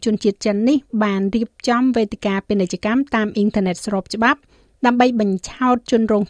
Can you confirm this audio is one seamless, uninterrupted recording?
yes; 0 cuts

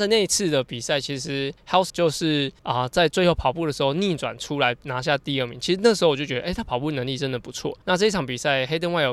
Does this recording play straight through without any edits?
no; 4 cuts; at 1.6 s, 1.9 s, 2.6 s, 7.8 s

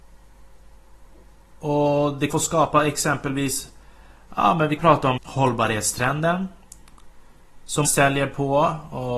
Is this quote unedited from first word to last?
no; 4 cuts; at 2.3 s, 4.8 s, 5.2 s, 7.8 s

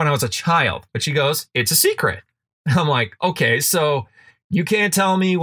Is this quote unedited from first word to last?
yes; 0 cuts

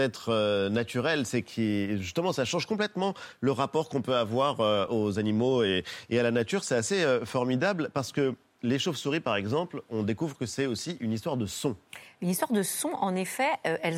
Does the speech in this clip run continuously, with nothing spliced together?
yes; 0 cuts

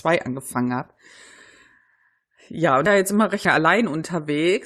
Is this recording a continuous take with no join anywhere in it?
no; 2 cuts; at 2.9 s, 3.4 s

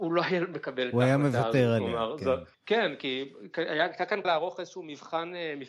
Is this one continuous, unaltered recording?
no; 2 cuts; at 2.5 s, 4.2 s

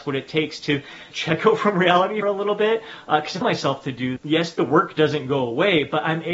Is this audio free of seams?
no; 4 cuts; at 1.1 s, 2.2 s, 3.4 s, 4.2 s

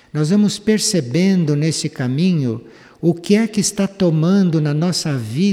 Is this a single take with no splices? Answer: yes; 0 cuts

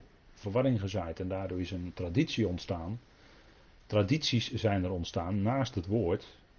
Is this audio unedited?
yes; 0 cuts

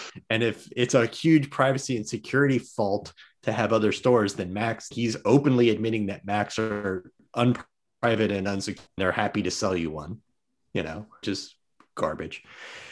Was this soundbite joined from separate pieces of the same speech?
yes; 3 cuts; at 4.9 s, 9.0 s, 11.2 s

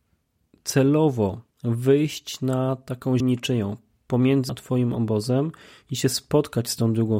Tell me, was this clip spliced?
yes; 3 cuts; at 1.5 s, 3.2 s, 4.5 s

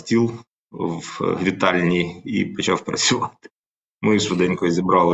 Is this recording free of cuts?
yes; 0 cuts

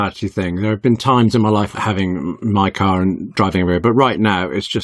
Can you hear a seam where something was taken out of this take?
yes; 1 cut; at 1.7 s

